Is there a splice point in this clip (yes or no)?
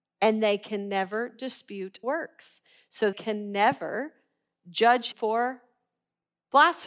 yes